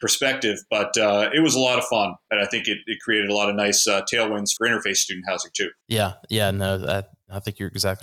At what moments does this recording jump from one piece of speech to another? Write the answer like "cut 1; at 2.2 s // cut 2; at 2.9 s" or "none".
cut 1; at 4.6 s // cut 2; at 5.8 s